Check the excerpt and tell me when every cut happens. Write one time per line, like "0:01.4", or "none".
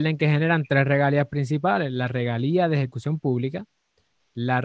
none